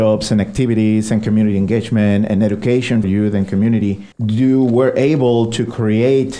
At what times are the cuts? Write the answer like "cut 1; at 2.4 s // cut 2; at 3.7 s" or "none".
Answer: cut 1; at 3.0 s // cut 2; at 4.1 s